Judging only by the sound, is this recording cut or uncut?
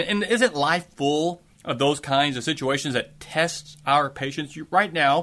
cut